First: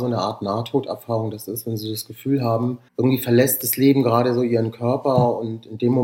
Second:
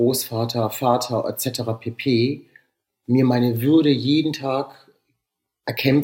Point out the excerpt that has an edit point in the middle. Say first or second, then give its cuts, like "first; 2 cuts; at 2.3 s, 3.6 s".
first; 1 cut; at 2.9 s